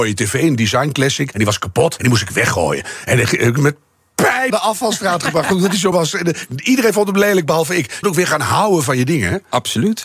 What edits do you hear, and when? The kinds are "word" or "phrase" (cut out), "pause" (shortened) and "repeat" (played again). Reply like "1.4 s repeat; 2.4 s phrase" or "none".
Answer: 1.3 s word; 2.0 s word; 4.5 s word; 5.9 s word; 8.0 s word